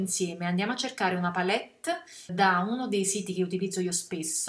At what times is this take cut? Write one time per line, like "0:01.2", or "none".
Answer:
0:02.3